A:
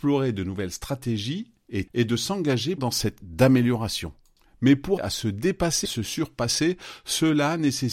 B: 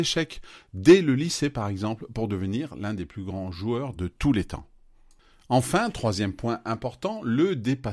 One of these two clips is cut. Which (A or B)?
A